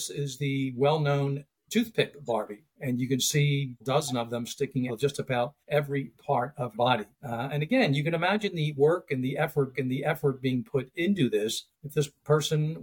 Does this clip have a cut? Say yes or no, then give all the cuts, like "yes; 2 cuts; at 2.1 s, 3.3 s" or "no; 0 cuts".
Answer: yes; 9 cuts; at 1.6 s, 2.7 s, 3.8 s, 4.9 s, 5.6 s, 6.7 s, 7.1 s, 9.7 s, 11.7 s